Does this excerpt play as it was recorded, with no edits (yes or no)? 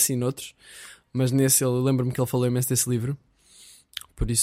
yes